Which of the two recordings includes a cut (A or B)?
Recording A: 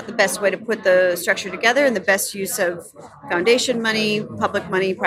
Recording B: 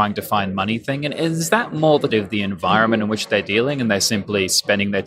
B